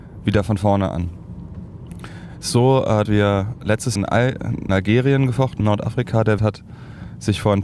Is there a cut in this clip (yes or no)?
yes